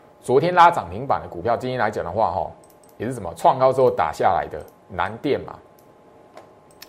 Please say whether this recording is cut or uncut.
uncut